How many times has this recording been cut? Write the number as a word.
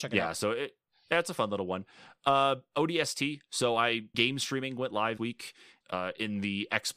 three